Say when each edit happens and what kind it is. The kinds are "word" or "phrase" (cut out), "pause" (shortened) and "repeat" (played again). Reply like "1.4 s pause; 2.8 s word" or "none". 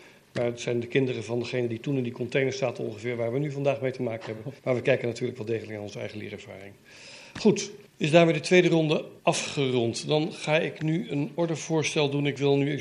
4.6 s pause; 7.9 s pause; 9.2 s pause

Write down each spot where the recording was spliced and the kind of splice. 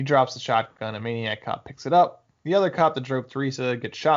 none

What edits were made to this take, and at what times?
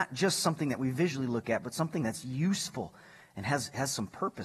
none

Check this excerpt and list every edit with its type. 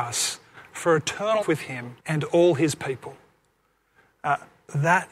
1.4 s word; 2.0 s pause

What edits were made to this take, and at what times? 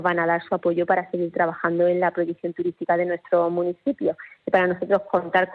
none

